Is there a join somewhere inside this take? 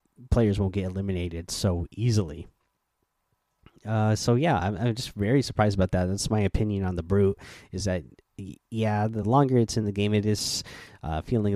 no; 0 cuts

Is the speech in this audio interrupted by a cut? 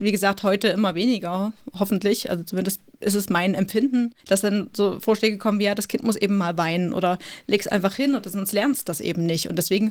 yes; 1 cut; at 4.2 s

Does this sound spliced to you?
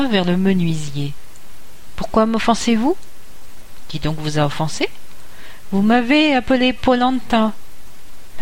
no; 0 cuts

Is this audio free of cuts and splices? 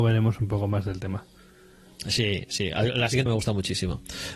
no; 1 cut; at 3.3 s

